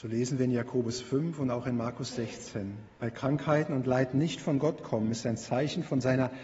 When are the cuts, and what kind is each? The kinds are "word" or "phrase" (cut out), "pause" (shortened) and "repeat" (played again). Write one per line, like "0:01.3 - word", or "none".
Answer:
0:02.9 - pause